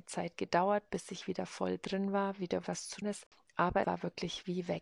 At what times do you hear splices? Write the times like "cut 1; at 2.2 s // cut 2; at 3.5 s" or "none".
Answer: cut 1; at 2.6 s // cut 2; at 3.0 s // cut 3; at 3.8 s